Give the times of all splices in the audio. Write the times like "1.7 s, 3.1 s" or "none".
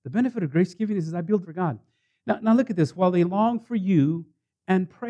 1.4 s